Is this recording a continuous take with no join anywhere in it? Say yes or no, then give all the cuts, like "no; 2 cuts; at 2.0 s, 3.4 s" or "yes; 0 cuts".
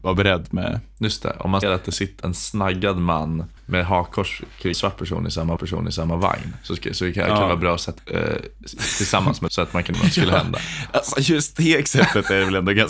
no; 8 cuts; at 1.6 s, 2.2 s, 3.6 s, 4.7 s, 5.6 s, 8.0 s, 9.5 s, 9.9 s